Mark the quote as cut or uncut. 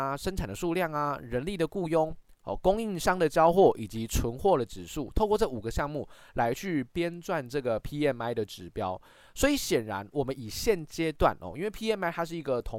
uncut